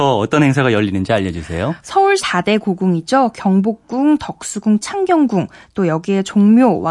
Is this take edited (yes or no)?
yes